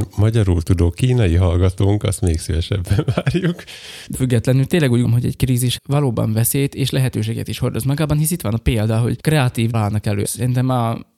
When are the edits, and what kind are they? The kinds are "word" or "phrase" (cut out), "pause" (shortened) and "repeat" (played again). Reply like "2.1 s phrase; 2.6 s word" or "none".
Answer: 4.1 s word; 5.0 s word; 5.8 s word; 9.2 s word; 9.7 s word; 10.2 s phrase